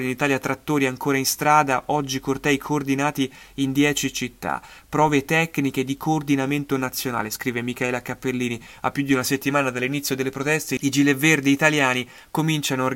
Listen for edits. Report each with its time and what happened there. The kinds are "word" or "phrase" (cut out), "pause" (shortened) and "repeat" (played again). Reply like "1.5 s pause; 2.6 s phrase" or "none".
none